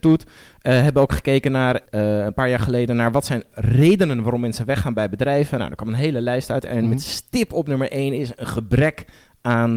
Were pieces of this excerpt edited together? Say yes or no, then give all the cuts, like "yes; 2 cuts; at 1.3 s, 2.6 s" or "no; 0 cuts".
no; 0 cuts